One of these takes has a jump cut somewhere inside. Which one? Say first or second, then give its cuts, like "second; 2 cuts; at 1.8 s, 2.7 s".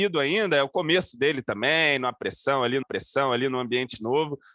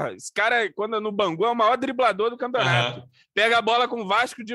first; 1 cut; at 2.8 s